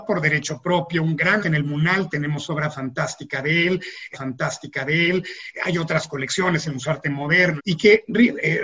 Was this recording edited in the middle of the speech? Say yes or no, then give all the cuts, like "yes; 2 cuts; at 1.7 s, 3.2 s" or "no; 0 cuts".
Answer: yes; 3 cuts; at 1.4 s, 4.1 s, 7.6 s